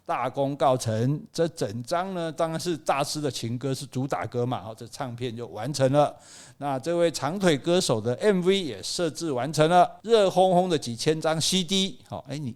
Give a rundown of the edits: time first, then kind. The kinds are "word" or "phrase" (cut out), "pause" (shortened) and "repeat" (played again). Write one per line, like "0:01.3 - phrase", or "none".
0:10.0 - pause